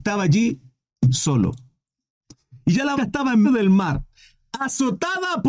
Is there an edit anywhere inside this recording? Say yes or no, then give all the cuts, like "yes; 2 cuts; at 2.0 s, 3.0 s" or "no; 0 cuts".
yes; 2 cuts; at 3.0 s, 3.4 s